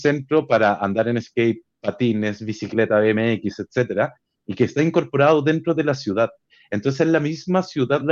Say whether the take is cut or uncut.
uncut